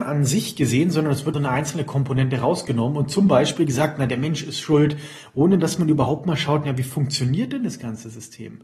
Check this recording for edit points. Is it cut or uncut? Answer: cut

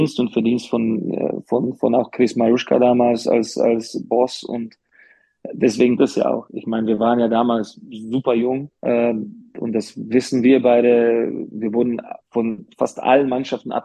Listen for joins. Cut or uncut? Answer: cut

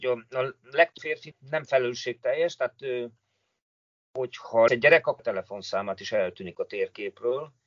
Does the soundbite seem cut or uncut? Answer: cut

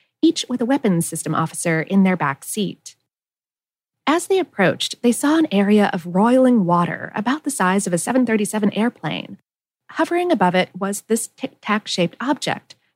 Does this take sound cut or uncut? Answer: uncut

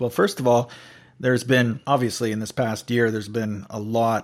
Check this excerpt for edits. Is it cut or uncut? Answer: cut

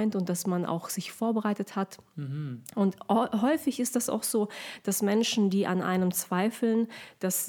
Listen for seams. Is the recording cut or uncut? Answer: uncut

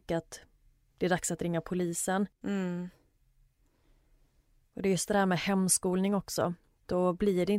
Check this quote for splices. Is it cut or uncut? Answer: cut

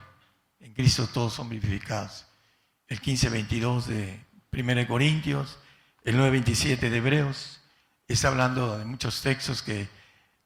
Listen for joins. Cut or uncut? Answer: uncut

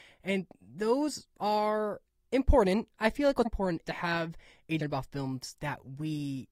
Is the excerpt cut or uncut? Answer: cut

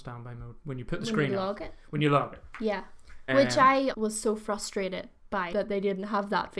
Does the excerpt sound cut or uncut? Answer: cut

